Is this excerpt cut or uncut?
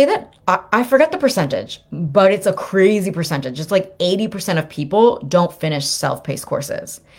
uncut